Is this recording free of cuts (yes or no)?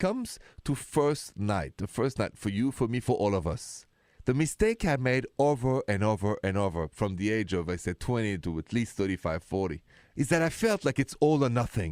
yes